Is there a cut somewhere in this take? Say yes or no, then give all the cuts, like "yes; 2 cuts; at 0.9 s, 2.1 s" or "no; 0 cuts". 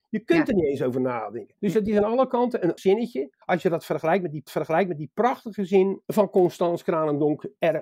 yes; 5 cuts; at 1.6 s, 2.8 s, 3.4 s, 4.5 s, 6.0 s